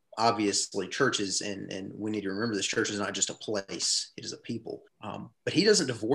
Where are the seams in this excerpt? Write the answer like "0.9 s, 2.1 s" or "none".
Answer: 4.9 s